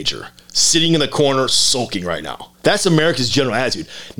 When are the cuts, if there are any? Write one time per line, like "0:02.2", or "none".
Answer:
0:02.6